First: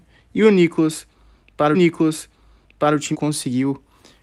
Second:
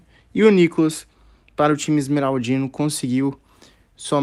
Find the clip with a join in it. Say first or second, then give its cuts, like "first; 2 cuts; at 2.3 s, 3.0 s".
first; 2 cuts; at 1.7 s, 3.1 s